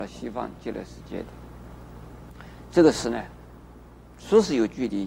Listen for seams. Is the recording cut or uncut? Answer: uncut